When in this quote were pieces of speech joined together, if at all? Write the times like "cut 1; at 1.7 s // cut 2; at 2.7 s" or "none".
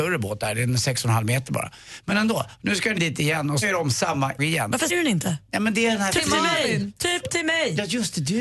cut 1; at 3.0 s // cut 2; at 3.6 s // cut 3; at 4.4 s // cut 4; at 4.9 s